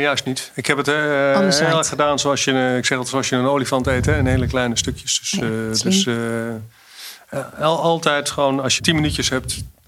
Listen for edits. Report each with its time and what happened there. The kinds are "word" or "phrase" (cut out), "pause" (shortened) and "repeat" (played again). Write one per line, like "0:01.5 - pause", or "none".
0:08.8 - word